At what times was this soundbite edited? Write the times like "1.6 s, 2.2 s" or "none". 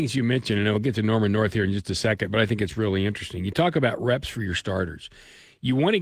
none